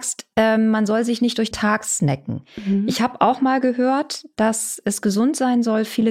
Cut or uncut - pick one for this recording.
cut